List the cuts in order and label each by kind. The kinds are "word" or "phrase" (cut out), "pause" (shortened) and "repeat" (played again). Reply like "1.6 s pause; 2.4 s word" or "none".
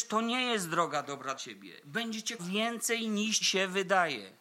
1.3 s word; 2.4 s word; 3.4 s word